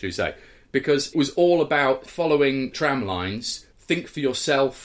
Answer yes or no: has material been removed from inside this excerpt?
yes